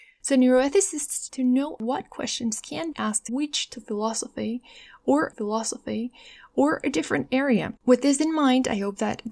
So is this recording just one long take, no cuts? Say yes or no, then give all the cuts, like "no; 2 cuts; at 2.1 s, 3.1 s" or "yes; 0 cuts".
no; 5 cuts; at 1.3 s, 2.9 s, 3.3 s, 5.3 s, 7.8 s